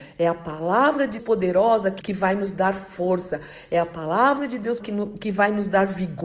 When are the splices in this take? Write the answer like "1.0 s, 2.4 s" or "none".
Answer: 1.2 s, 2.0 s, 4.8 s

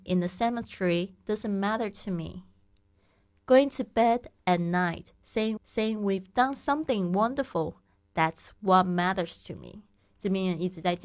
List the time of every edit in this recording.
5.6 s

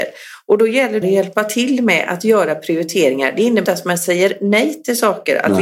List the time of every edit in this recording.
1.0 s, 3.6 s

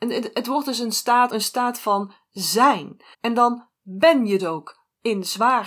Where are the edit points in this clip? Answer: 1.3 s, 3.1 s, 4.4 s

